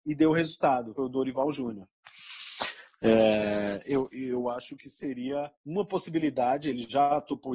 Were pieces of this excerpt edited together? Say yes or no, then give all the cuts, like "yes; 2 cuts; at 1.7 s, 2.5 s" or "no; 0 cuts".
yes; 2 cuts; at 1.0 s, 5.5 s